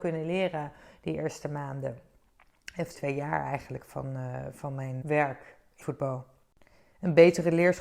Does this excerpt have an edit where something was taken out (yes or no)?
yes